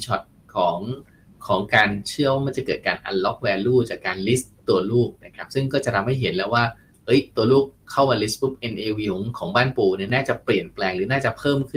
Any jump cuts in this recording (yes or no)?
no